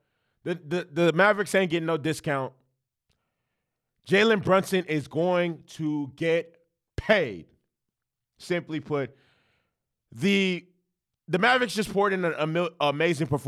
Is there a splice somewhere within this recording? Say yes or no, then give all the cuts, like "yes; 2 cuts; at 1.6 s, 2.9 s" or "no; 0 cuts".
no; 0 cuts